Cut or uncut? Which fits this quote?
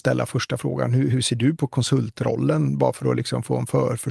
uncut